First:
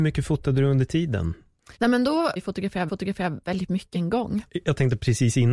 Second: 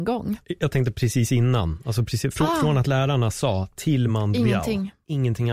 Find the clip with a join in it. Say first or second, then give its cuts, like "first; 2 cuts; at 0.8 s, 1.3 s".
first; 4 cuts; at 1.8 s, 2.4 s, 2.9 s, 3.9 s